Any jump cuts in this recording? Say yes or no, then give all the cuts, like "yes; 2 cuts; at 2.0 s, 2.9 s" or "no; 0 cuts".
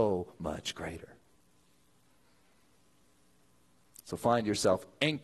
no; 0 cuts